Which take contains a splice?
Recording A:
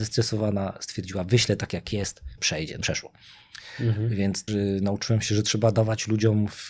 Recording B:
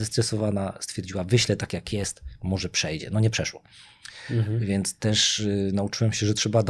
A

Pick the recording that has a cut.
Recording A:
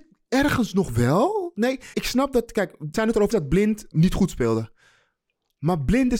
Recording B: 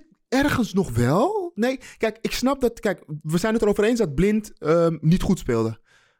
A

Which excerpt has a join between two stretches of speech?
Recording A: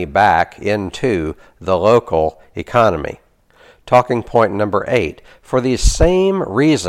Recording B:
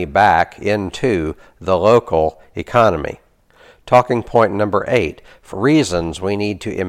B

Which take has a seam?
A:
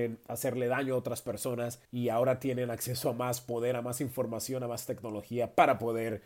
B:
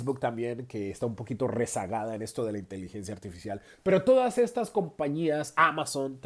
A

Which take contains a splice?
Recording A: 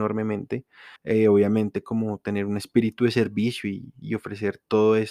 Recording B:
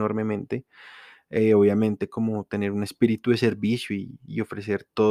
A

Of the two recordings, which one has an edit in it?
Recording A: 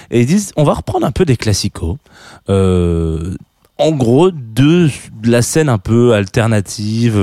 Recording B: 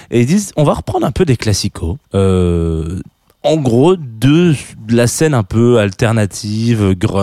B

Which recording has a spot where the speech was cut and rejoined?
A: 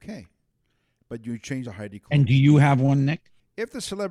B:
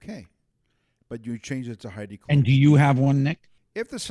A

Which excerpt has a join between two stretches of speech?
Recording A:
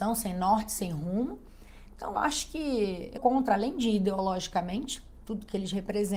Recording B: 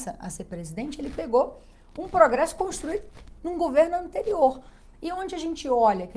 A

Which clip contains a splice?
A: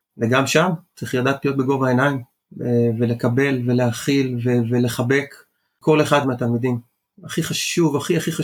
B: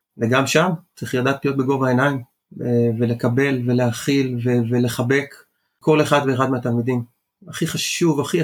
A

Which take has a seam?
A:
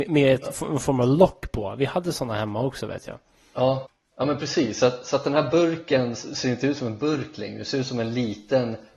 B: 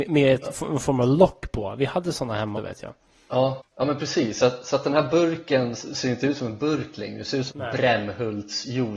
B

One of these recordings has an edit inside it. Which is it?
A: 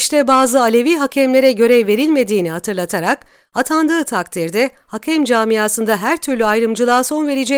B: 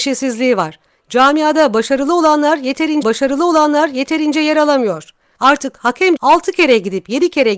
B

